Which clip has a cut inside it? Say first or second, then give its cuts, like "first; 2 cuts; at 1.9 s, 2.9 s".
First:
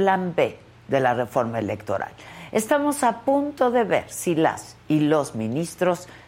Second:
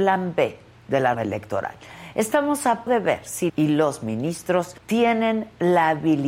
second; 4 cuts; at 1.1 s, 2.9 s, 3.5 s, 4.8 s